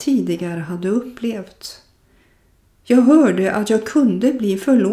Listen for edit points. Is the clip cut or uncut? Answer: uncut